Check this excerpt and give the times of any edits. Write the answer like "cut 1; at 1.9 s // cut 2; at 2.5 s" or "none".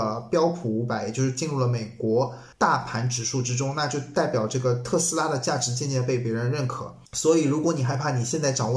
cut 1; at 2.5 s // cut 2; at 7.1 s